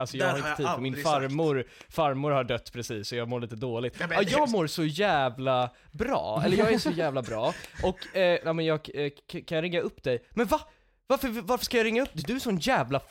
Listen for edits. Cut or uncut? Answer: uncut